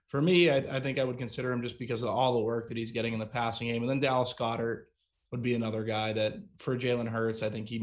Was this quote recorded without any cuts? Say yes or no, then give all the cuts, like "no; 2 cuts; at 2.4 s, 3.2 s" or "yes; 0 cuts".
yes; 0 cuts